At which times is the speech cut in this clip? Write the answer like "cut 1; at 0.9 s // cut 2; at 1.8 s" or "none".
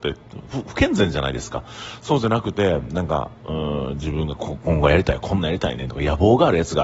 cut 1; at 3.4 s

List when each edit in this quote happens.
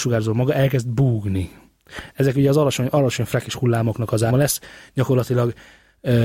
cut 1; at 4.3 s

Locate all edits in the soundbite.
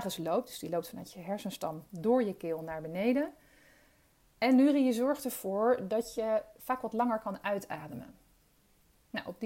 none

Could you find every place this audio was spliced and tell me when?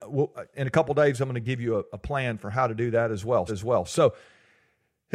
cut 1; at 3.5 s

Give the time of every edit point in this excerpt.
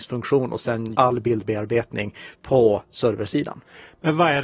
cut 1; at 0.9 s

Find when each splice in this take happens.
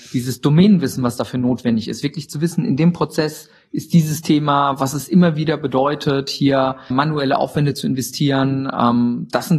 cut 1; at 6.9 s

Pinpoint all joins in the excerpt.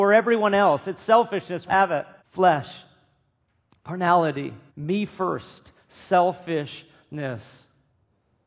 cut 1; at 1.7 s // cut 2; at 2.2 s // cut 3; at 4.7 s

